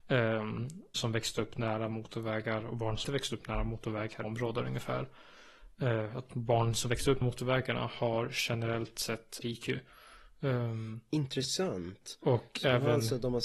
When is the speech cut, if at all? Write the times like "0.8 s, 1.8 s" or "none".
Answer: 0.9 s, 3.0 s, 4.2 s, 7.2 s, 9.4 s